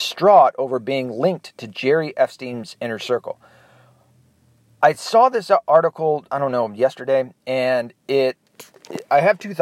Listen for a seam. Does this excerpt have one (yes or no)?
no